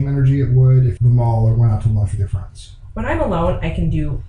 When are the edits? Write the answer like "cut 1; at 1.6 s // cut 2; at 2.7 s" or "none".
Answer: cut 1; at 1.0 s